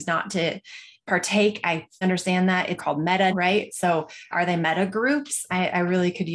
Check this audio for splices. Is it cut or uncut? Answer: cut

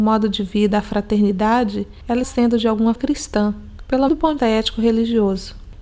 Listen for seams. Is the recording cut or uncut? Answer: cut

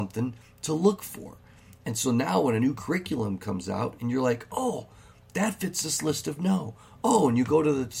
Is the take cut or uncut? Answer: uncut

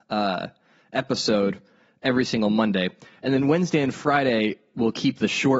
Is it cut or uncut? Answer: uncut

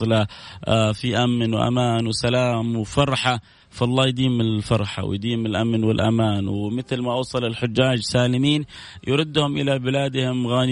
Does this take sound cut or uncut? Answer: uncut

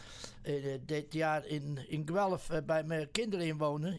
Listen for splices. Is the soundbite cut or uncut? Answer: uncut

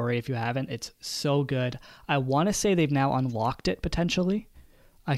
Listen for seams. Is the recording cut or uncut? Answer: uncut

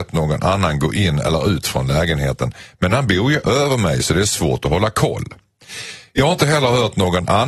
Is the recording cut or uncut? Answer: uncut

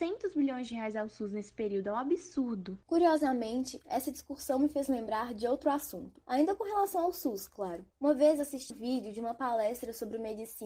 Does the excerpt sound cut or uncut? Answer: cut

